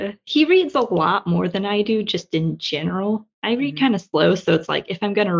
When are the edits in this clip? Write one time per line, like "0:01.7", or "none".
0:03.3

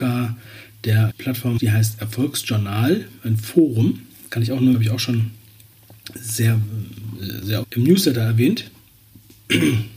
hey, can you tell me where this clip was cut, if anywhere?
0:01.1
0:01.6
0:04.7
0:07.6

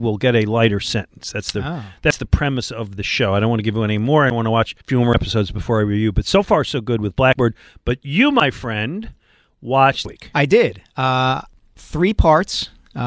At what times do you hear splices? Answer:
0:04.8
0:10.0

